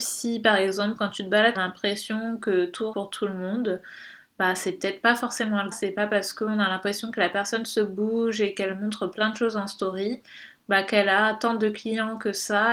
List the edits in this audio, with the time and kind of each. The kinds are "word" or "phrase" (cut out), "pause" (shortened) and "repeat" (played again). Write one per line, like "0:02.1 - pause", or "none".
0:01.5 - phrase
0:02.9 - word
0:05.7 - word